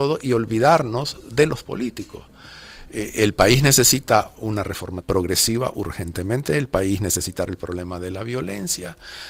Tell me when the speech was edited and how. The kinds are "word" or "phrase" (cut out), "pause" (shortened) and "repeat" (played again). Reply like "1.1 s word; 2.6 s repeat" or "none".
1.6 s word; 4.3 s word; 5.0 s word; 7.5 s word